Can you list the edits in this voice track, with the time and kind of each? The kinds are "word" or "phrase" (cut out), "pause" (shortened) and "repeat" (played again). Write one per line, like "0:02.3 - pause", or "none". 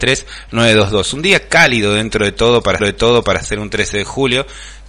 0:02.8 - repeat